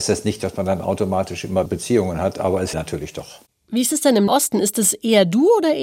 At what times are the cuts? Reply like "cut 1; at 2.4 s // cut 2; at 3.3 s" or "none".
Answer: cut 1; at 1.7 s // cut 2; at 2.7 s // cut 3; at 4.3 s